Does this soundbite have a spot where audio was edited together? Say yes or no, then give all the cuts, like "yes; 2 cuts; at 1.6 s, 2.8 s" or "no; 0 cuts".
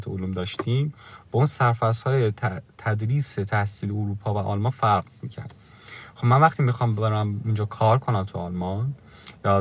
no; 0 cuts